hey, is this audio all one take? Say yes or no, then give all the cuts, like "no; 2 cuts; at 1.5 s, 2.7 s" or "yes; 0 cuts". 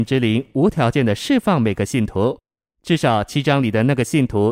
yes; 0 cuts